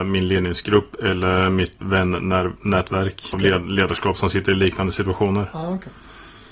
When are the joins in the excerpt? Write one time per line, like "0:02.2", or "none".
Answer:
0:01.8
0:03.3

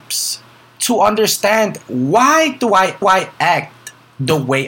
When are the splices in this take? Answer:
0:03.0

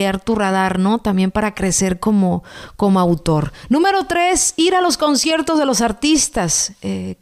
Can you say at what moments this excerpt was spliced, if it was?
none

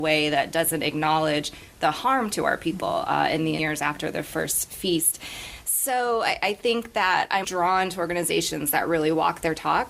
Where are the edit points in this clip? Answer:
0:03.6
0:07.4

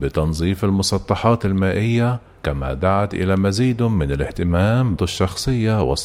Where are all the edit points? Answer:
0:02.4
0:05.0

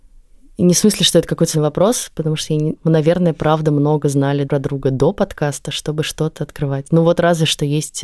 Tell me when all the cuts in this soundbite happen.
0:01.5
0:02.7
0:04.4

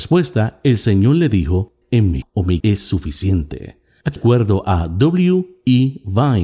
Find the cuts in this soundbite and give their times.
0:01.8
0:02.2
0:02.6
0:04.2

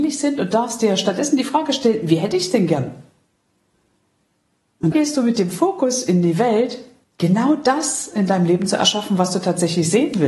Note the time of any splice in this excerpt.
0:04.9
0:07.0

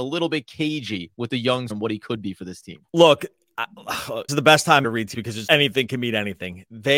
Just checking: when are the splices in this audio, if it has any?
0:01.7
0:02.9
0:04.3
0:04.8
0:05.1
0:05.5

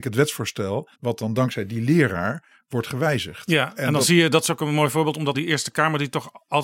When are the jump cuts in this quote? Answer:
0:00.9
0:05.3

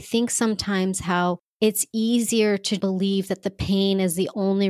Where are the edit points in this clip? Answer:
0:02.8

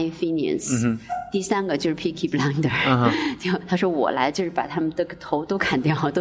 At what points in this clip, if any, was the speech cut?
none

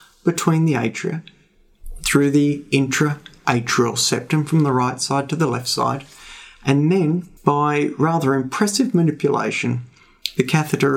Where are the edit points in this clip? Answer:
0:07.4

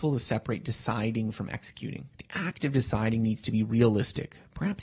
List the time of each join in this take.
0:02.1

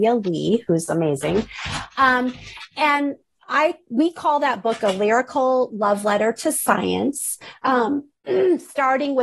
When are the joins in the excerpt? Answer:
none

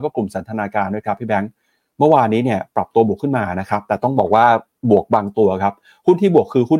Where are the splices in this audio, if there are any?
none

